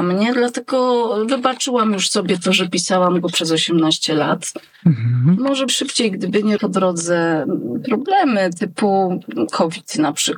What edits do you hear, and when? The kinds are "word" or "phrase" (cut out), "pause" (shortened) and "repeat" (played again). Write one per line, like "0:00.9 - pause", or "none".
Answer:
0:05.7 - word
0:06.6 - word